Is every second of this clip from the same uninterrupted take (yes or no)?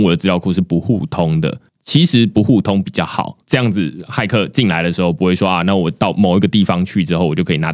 no